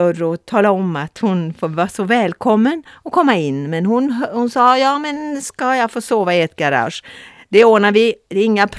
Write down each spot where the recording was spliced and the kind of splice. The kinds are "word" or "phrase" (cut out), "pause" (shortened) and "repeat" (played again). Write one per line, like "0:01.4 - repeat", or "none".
none